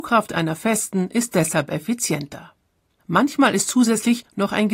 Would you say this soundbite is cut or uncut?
uncut